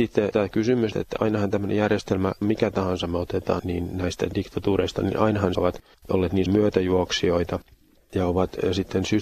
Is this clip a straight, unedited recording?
no; 6 cuts; at 0.9 s, 2.4 s, 3.6 s, 5.5 s, 5.9 s, 6.5 s

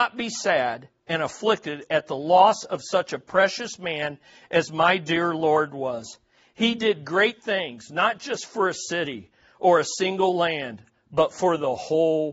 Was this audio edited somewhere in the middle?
no; 0 cuts

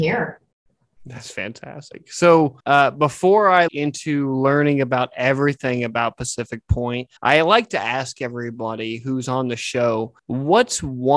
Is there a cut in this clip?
yes; 4 cuts; at 2.6 s, 3.7 s, 7.2 s, 10.2 s

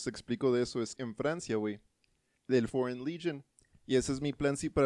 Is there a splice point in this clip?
yes; 3 cuts; at 0.9 s, 2.4 s, 2.7 s

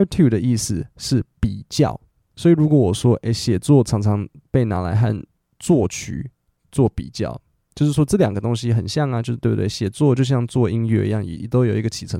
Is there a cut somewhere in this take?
no; 0 cuts

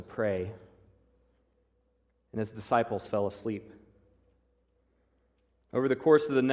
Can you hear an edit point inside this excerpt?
no; 0 cuts

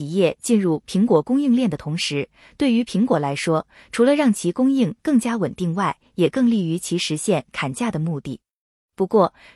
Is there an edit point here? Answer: no; 0 cuts

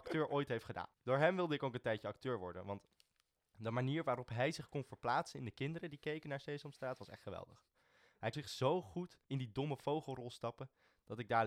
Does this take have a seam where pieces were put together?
yes; 3 cuts; at 0.9 s, 8.3 s, 9.2 s

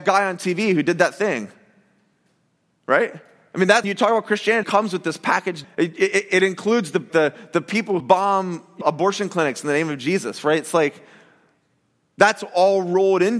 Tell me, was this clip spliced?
yes; 6 cuts; at 3.8 s, 4.6 s, 5.6 s, 7.1 s, 8.0 s, 8.8 s

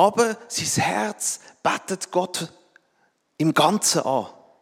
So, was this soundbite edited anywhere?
no; 0 cuts

